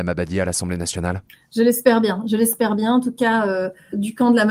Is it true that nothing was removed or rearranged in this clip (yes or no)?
yes